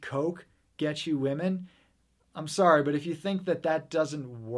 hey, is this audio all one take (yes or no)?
yes